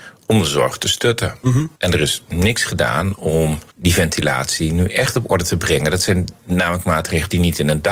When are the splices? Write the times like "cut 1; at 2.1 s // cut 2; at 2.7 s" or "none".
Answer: cut 1; at 1.7 s // cut 2; at 3.7 s